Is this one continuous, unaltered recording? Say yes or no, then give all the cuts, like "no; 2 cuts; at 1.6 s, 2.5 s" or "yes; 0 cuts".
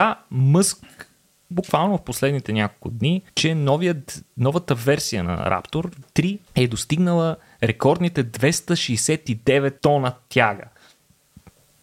no; 5 cuts; at 1.5 s, 3.3 s, 6.0 s, 6.5 s, 9.8 s